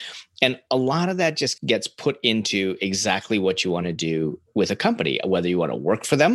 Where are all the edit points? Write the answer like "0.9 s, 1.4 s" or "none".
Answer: none